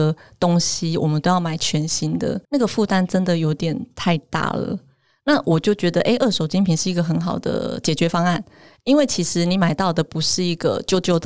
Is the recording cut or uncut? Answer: cut